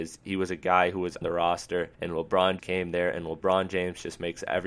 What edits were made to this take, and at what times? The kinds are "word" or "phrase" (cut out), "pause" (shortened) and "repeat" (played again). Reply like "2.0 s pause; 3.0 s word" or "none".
1.2 s word; 1.9 s pause; 2.6 s word